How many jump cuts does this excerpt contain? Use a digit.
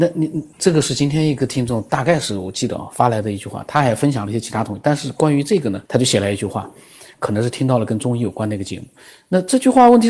1